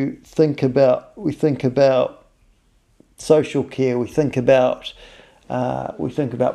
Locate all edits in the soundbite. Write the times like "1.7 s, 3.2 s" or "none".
none